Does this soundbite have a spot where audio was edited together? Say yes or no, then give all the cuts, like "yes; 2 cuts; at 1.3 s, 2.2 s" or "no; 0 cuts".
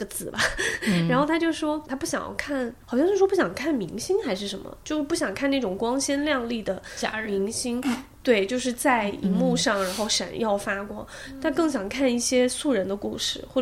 yes; 1 cut; at 2.8 s